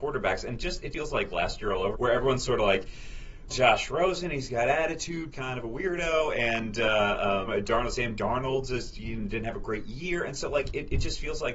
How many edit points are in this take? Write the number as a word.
five